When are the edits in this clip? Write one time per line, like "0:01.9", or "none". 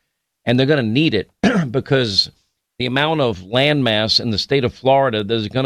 none